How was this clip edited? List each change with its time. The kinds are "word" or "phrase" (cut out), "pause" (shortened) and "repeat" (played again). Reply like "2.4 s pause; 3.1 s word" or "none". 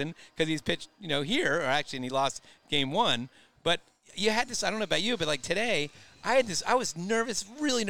none